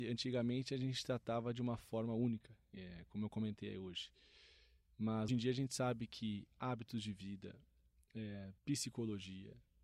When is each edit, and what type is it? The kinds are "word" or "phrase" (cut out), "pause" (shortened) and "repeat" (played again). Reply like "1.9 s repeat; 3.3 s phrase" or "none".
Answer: 5.3 s word; 8.6 s pause